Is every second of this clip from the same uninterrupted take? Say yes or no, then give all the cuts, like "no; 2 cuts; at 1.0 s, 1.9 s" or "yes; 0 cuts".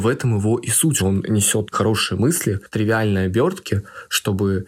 no; 2 cuts; at 1.0 s, 1.7 s